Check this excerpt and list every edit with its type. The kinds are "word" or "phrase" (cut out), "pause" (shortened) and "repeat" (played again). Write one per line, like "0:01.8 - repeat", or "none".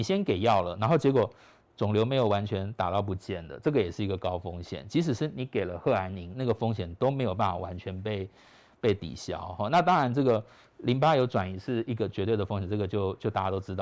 none